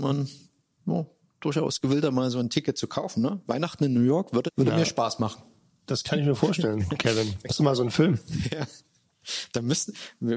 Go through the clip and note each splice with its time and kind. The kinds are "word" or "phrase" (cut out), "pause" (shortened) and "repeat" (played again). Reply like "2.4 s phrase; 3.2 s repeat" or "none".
4.5 s word; 7.5 s word